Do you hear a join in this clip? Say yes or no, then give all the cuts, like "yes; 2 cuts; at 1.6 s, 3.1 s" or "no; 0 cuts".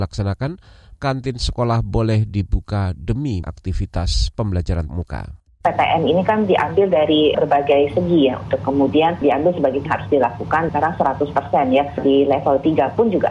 yes; 5 cuts; at 1.0 s, 3.4 s, 4.9 s, 9.9 s, 10.7 s